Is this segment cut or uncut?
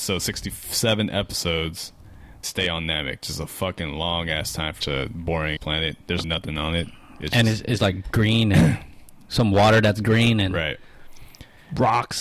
cut